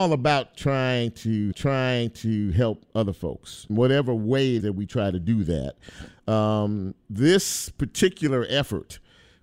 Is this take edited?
yes; 4 cuts; at 1.5 s, 3.7 s, 4.6 s, 7.0 s

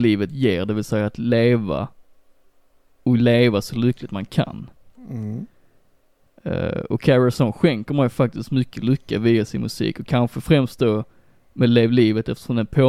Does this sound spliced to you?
no; 0 cuts

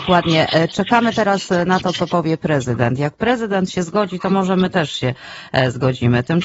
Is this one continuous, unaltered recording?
yes; 0 cuts

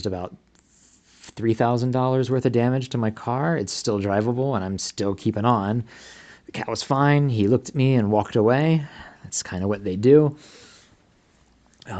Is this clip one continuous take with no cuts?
yes; 0 cuts

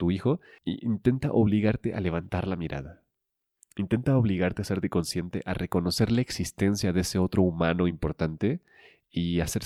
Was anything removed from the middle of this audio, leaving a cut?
no; 0 cuts

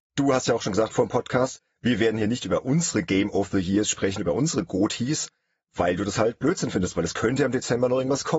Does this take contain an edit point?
no; 0 cuts

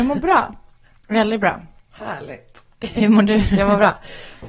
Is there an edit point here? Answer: no; 0 cuts

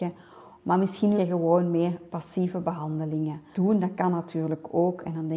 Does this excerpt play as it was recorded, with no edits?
no; 2 cuts; at 1.2 s, 3.5 s

